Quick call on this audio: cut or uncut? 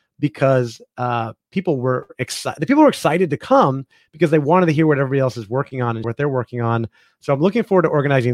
cut